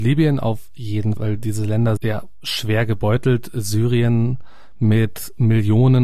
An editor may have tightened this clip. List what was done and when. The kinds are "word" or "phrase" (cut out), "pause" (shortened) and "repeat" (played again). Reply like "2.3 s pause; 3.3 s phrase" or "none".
1.2 s word; 2.0 s phrase